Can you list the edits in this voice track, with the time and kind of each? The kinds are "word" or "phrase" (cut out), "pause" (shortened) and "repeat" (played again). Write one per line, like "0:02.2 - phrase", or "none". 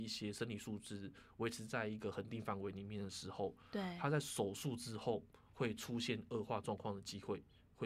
none